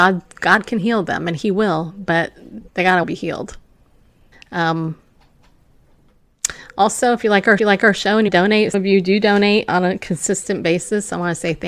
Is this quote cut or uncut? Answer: cut